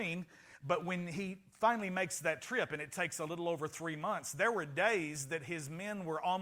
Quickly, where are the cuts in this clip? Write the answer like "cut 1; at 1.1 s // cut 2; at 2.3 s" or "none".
none